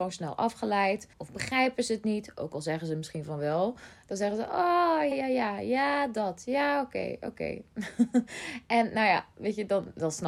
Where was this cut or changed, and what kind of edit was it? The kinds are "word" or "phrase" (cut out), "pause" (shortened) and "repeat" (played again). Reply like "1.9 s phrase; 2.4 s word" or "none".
1.1 s pause; 5.1 s word